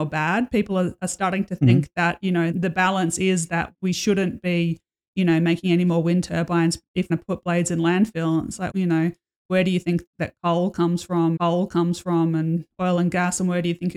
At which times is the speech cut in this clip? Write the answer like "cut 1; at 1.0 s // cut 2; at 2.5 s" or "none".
cut 1; at 2.5 s // cut 2; at 3.7 s // cut 3; at 7.1 s // cut 4; at 8.7 s // cut 5; at 10.1 s // cut 6; at 11.4 s